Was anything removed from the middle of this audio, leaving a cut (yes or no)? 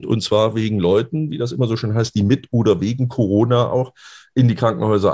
no